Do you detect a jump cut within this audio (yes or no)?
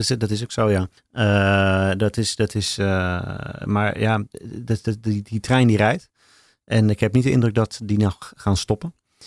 no